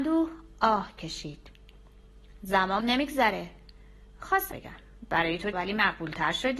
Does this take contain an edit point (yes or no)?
yes